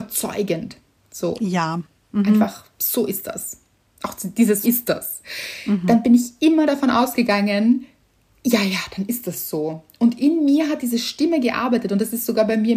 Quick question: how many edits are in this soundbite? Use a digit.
1